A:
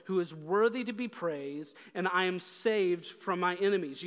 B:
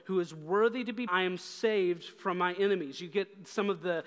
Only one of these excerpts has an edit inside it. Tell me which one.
B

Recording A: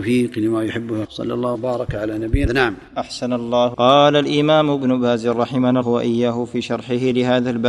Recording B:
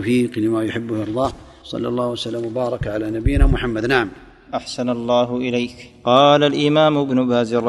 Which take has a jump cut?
A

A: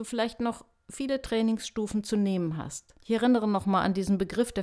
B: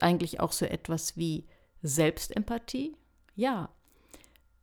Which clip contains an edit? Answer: A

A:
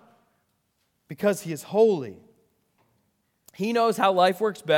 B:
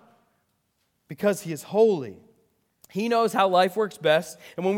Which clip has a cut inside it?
B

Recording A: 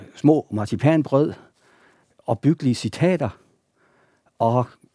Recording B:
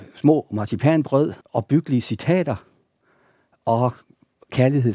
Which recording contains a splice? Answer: B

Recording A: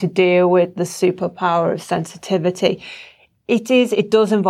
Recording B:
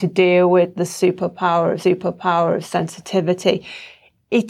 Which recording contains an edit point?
B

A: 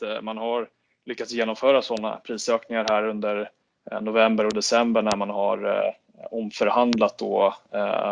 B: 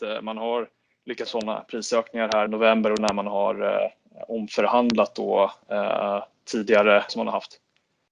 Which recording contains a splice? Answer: B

